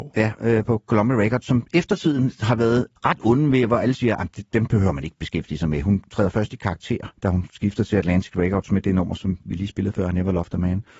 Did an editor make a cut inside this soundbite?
yes; 2 cuts; at 3.0 s, 7.2 s

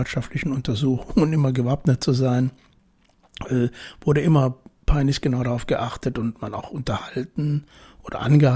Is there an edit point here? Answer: no; 0 cuts

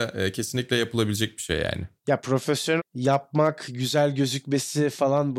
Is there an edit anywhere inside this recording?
yes; 2 cuts; at 2.0 s, 2.8 s

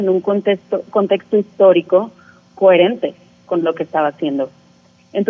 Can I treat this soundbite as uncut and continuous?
yes; 0 cuts

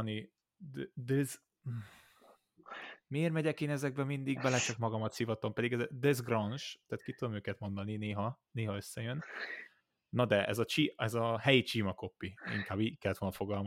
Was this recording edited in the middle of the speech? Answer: no; 0 cuts

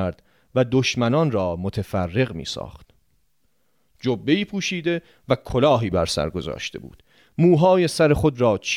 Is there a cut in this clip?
no; 0 cuts

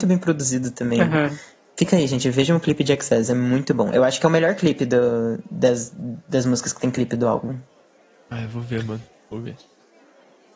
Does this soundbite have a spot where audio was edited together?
no; 0 cuts

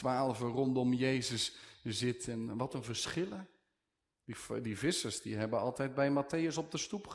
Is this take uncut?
yes; 0 cuts

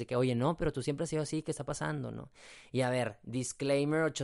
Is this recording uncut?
yes; 0 cuts

